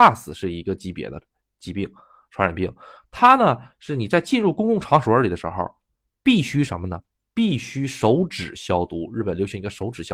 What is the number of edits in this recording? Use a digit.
0